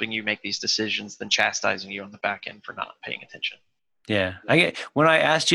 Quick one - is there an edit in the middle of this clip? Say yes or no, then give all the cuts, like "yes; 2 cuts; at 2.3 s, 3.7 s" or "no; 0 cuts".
no; 0 cuts